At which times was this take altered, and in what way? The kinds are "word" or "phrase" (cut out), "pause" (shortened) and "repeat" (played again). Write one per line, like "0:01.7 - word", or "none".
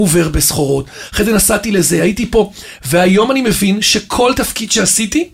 none

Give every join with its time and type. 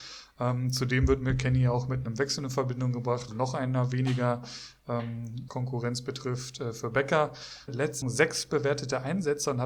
0:03.3 - word
0:05.5 - word
0:07.7 - word
0:08.0 - word

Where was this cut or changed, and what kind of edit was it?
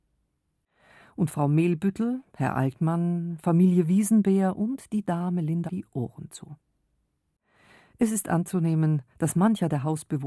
0:02.3 - pause
0:05.7 - phrase
0:09.1 - pause

